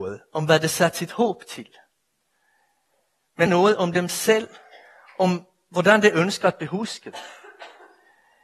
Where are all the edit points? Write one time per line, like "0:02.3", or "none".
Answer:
0:03.5